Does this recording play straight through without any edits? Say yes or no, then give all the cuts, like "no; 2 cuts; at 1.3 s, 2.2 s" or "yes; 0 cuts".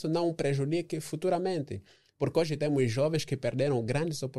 yes; 0 cuts